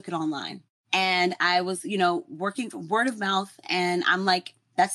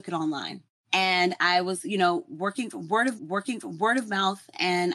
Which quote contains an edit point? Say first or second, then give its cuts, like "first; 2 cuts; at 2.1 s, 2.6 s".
second; 1 cut; at 3.2 s